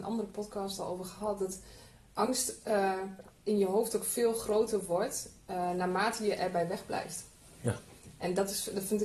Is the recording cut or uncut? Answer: uncut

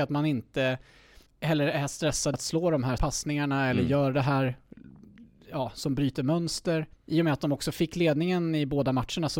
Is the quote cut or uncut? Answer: cut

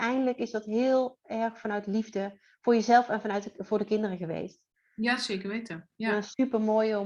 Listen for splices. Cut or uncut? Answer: uncut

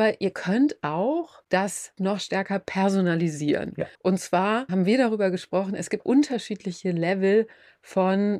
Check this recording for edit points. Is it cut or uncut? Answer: cut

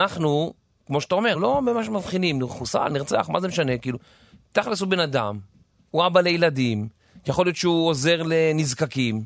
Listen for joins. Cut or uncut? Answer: cut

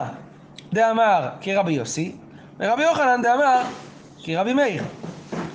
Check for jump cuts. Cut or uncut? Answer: uncut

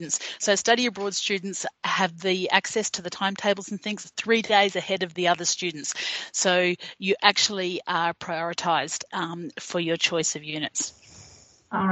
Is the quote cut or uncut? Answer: uncut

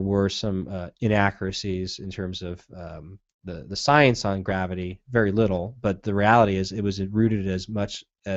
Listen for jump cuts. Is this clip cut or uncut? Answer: uncut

